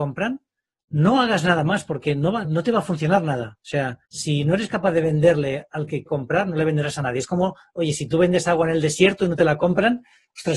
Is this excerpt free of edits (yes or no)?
no